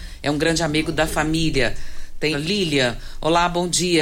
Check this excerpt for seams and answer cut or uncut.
cut